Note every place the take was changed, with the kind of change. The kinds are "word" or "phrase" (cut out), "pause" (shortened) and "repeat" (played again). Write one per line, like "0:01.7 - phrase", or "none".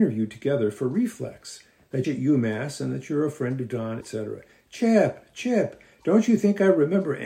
0:02.0 - phrase
0:04.0 - word